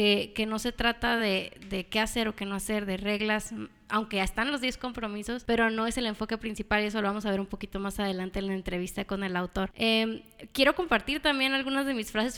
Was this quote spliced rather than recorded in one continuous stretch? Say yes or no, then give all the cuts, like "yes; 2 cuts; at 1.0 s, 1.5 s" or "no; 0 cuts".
no; 0 cuts